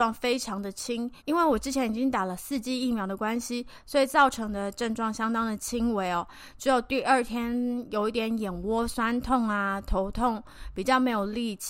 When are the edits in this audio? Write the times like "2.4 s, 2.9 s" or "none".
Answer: 1.2 s